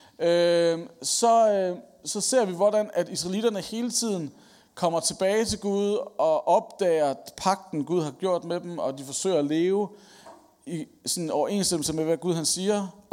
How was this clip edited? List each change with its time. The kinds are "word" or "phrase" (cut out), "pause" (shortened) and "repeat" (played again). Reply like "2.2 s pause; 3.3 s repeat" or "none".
none